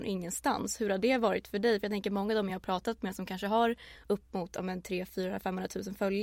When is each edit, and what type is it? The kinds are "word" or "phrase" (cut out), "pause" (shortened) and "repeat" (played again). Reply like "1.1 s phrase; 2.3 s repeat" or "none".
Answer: none